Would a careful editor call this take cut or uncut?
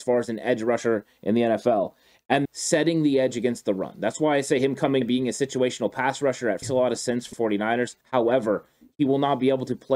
cut